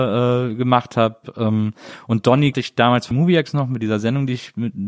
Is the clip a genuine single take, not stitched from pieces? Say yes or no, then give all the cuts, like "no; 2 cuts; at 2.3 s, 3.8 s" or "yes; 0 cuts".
no; 2 cuts; at 2.5 s, 3.1 s